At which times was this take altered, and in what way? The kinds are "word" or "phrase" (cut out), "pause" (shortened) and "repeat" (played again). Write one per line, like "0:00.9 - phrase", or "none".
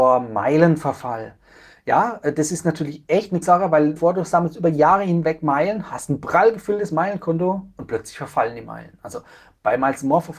0:03.4 - word
0:04.0 - word